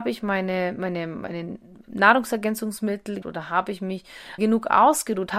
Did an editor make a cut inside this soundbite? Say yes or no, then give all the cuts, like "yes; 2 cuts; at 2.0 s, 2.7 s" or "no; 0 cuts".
yes; 2 cuts; at 3.2 s, 4.4 s